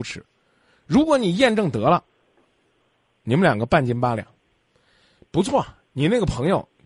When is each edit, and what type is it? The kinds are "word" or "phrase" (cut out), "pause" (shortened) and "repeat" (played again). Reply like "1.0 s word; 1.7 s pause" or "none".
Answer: none